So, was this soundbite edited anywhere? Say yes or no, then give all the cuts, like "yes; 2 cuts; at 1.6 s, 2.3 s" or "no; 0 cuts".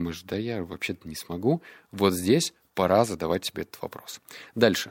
no; 0 cuts